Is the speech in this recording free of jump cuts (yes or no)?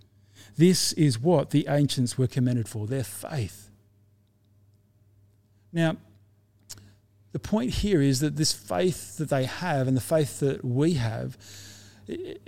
yes